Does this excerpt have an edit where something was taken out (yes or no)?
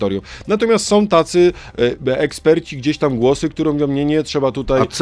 no